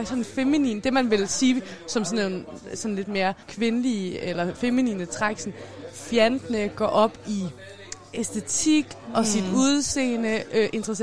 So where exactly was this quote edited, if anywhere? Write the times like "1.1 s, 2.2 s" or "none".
3.4 s